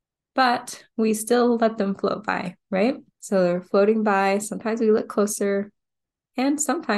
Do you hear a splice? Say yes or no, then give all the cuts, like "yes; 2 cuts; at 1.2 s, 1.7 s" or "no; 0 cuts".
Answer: yes; 1 cut; at 3.1 s